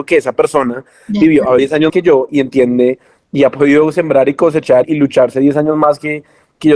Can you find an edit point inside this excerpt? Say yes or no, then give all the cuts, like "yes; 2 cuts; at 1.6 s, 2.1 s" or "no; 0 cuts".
yes; 3 cuts; at 1.6 s, 1.9 s, 4.8 s